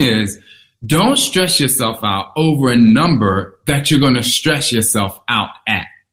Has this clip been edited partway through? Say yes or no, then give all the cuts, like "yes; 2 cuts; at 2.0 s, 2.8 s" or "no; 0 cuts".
no; 0 cuts